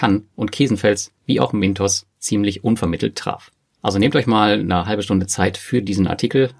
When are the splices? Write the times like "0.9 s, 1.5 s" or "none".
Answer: none